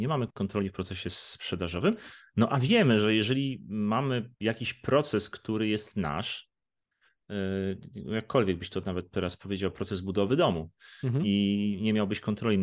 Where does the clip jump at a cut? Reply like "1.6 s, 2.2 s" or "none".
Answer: 4.4 s